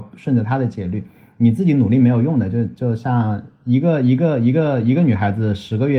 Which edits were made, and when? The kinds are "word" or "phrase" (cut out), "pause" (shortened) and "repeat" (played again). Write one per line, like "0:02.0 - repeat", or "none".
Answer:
none